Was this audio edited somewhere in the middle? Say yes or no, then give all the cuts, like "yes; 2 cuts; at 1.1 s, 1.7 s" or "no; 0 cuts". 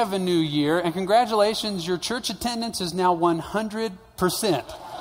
no; 0 cuts